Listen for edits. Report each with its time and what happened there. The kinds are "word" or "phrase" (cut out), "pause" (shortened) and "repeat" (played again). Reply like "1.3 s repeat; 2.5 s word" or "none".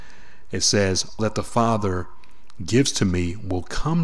1.2 s word